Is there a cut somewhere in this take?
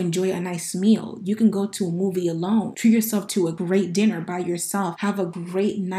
no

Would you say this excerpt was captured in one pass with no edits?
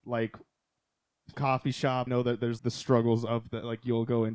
no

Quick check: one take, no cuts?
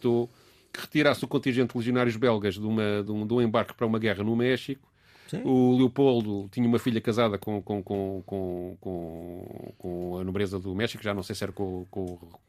yes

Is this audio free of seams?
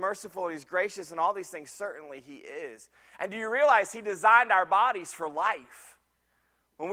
yes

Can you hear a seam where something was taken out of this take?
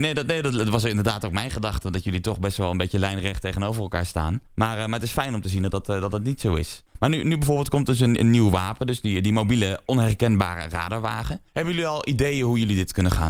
yes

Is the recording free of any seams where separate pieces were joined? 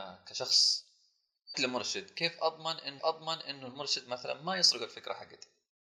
no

